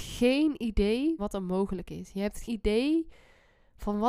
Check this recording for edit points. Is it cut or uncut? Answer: cut